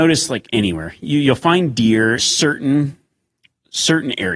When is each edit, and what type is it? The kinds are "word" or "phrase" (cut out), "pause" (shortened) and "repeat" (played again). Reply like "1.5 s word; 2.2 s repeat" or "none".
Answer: 2.2 s word